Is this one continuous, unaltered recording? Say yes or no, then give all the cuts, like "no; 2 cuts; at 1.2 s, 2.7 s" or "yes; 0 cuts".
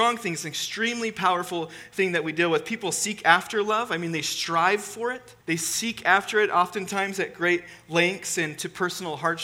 no; 1 cut; at 5.4 s